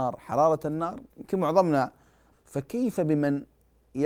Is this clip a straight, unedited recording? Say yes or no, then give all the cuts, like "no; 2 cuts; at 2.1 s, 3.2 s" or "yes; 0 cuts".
no; 2 cuts; at 1.1 s, 2.3 s